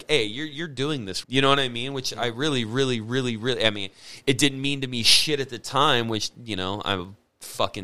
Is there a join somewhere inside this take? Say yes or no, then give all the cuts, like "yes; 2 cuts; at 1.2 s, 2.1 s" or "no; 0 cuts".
yes; 1 cut; at 1.2 s